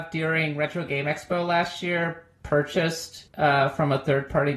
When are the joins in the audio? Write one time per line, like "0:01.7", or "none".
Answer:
0:03.3